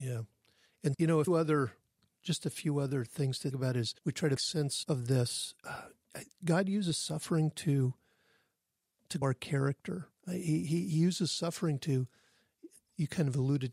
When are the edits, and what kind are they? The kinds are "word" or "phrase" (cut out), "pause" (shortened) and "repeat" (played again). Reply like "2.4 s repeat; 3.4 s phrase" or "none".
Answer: 0.9 s word; 1.3 s word; 3.5 s word; 4.0 s pause; 4.4 s word; 4.8 s word; 5.6 s pause; 9.2 s word; 10.2 s pause